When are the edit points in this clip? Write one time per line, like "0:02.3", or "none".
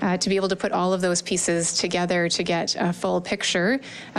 none